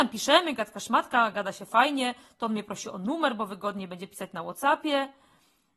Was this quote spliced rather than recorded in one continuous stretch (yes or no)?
no